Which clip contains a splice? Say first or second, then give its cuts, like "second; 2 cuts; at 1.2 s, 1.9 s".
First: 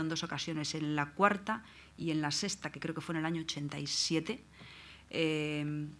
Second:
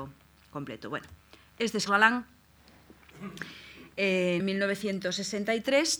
second; 2 cuts; at 1.9 s, 4.4 s